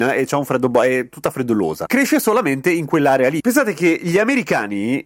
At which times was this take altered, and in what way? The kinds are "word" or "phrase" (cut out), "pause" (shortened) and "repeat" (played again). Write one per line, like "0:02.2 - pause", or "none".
none